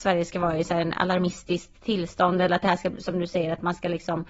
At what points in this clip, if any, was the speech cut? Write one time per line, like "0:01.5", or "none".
none